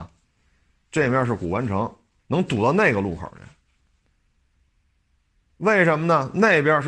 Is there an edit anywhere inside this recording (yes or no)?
yes